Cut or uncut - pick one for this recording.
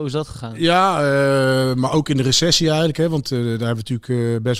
uncut